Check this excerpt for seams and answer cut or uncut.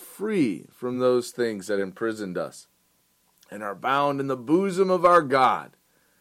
uncut